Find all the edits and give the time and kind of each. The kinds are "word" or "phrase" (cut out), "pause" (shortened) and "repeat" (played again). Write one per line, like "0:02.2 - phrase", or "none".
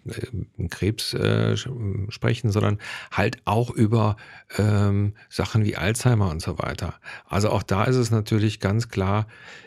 none